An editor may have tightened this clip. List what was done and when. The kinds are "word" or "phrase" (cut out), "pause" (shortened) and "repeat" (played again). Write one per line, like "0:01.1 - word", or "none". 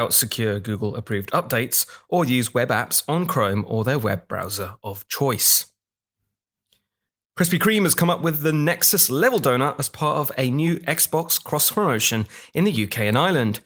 none